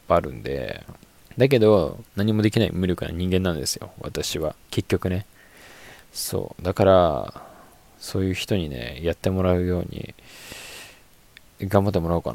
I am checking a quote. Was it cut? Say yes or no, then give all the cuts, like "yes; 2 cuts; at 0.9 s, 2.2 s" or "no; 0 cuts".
yes; 2 cuts; at 1.2 s, 4.6 s